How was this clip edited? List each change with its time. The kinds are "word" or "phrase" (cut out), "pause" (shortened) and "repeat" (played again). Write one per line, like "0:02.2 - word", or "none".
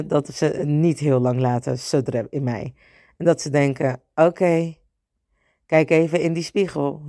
none